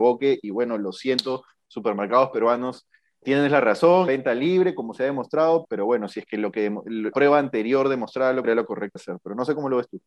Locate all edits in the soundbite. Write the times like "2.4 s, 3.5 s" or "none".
3.2 s, 4.1 s, 5.6 s, 7.1 s, 8.4 s, 9.0 s